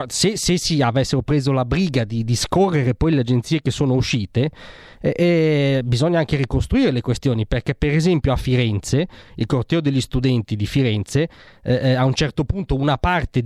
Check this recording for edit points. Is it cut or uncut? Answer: uncut